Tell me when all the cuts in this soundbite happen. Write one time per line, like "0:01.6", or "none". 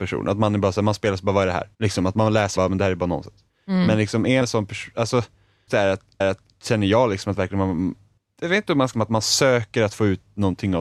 0:01.7
0:02.6
0:03.5
0:04.4
0:05.7
0:06.2
0:08.2
0:08.9